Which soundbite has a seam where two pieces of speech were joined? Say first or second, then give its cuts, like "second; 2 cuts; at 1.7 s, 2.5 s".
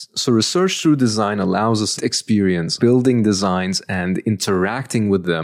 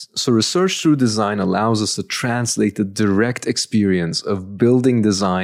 first; 2 cuts; at 2.0 s, 2.8 s